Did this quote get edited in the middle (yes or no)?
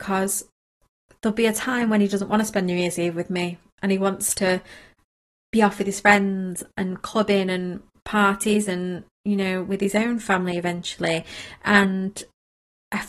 no